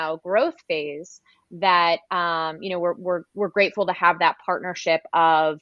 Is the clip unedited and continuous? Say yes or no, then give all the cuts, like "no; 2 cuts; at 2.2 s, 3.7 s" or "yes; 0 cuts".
yes; 0 cuts